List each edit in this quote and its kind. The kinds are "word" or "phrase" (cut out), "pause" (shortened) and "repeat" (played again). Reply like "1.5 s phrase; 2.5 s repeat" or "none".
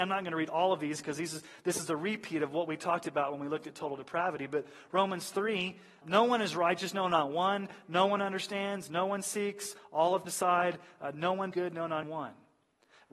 6.0 s word; 10.2 s word; 11.5 s word; 12.0 s word

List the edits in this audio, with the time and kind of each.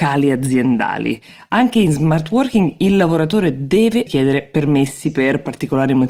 4.1 s word

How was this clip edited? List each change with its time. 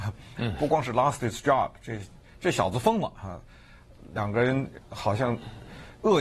none

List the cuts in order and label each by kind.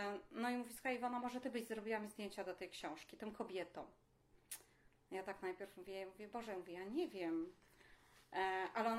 none

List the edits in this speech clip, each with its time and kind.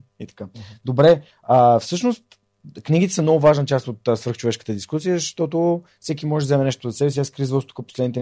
none

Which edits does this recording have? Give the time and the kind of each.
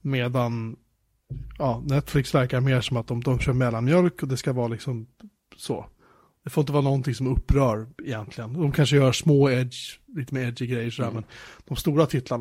none

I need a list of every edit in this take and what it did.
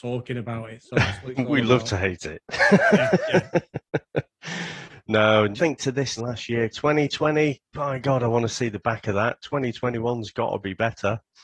5.6 s word; 6.2 s word; 6.7 s phrase

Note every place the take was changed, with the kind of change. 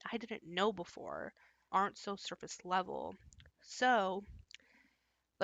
1.7 s word

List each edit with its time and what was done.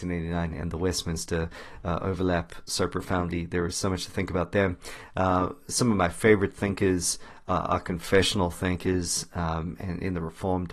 none

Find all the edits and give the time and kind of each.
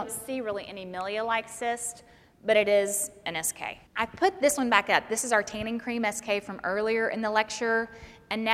3.9 s pause

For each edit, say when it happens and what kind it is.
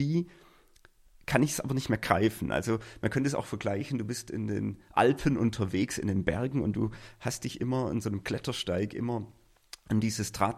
none

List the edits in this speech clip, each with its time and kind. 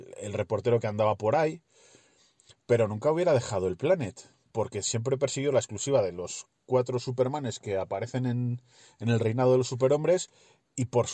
none

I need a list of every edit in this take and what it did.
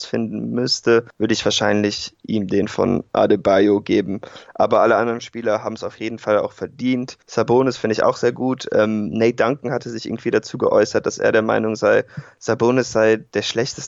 none

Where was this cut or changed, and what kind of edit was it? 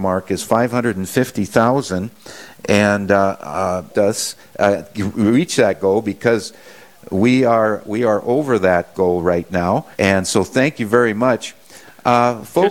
3.9 s phrase; 9.9 s pause

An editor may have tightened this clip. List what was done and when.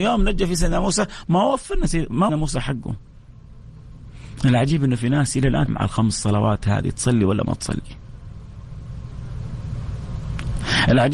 2.3 s phrase; 5.7 s word

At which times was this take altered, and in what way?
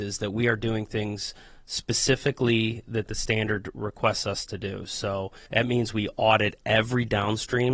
5.5 s pause

